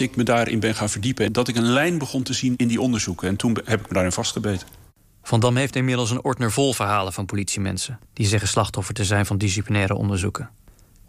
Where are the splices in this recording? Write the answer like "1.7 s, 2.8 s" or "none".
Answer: none